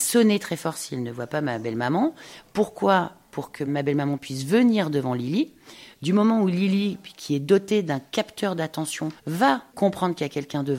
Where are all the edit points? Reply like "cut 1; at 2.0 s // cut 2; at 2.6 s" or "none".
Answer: cut 1; at 9.2 s